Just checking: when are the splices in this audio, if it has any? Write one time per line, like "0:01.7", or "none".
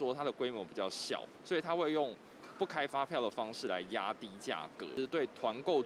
0:01.3